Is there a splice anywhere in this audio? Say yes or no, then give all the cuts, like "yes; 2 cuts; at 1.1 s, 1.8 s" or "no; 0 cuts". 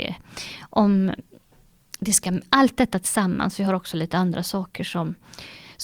no; 0 cuts